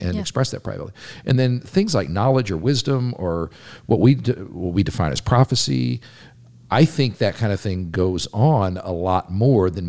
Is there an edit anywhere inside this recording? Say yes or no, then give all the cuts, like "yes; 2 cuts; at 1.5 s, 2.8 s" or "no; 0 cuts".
no; 0 cuts